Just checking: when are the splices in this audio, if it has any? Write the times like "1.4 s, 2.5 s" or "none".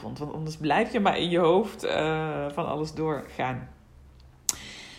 none